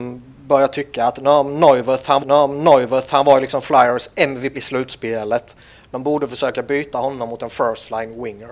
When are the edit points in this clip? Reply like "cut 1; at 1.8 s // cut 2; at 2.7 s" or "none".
cut 1; at 2.2 s // cut 2; at 4.5 s